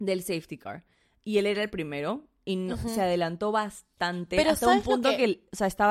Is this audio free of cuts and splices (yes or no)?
yes